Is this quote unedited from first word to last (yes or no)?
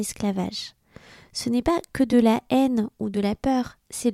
yes